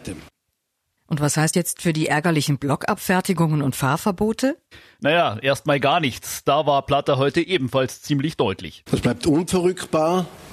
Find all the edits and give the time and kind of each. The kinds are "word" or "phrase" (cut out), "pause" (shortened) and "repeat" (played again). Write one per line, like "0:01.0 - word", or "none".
0:01.5 - word

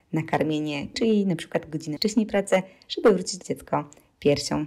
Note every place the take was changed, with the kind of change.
0:00.9 - word
0:02.0 - phrase
0:03.4 - phrase

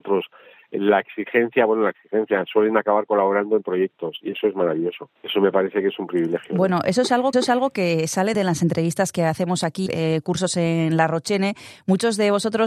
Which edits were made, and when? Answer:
0:05.2 - pause
0:07.3 - repeat
0:08.3 - phrase
0:09.9 - phrase

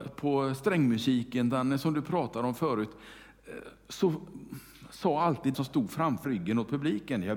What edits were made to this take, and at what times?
0:05.5 - word
0:06.2 - word

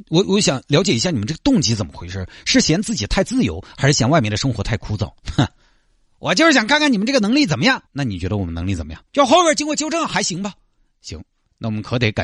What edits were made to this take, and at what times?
0:05.2 - pause
0:07.9 - pause
0:09.1 - pause

